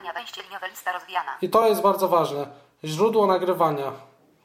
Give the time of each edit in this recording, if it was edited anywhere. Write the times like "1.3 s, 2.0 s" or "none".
none